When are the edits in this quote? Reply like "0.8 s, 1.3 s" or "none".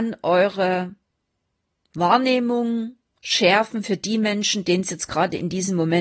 none